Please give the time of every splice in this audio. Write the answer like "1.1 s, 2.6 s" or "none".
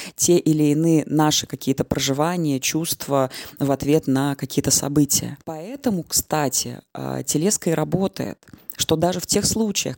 5.4 s